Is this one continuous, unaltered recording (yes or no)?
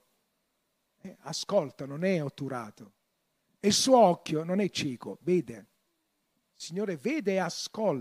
yes